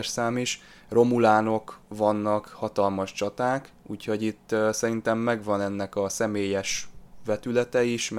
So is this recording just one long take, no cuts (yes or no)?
no